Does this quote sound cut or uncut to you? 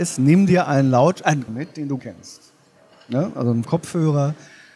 cut